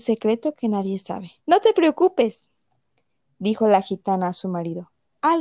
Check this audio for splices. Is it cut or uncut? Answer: cut